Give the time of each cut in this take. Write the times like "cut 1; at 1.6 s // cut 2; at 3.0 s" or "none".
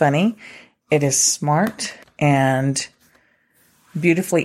cut 1; at 2.0 s